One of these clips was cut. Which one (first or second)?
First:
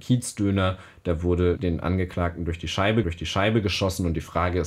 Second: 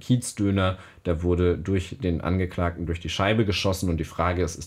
first